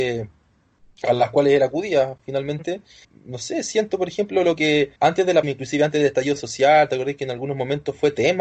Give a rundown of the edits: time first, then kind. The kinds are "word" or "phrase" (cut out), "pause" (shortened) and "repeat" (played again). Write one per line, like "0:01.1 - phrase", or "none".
0:03.0 - word
0:05.0 - pause
0:05.4 - word